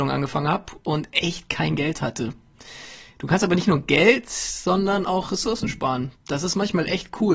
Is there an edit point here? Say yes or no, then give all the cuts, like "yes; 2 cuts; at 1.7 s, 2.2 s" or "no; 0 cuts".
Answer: no; 0 cuts